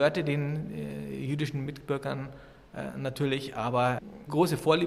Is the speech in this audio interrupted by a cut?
no; 0 cuts

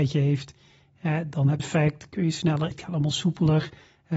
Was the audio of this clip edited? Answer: yes; 2 cuts; at 1.6 s, 2.7 s

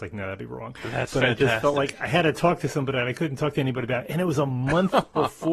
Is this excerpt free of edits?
yes; 0 cuts

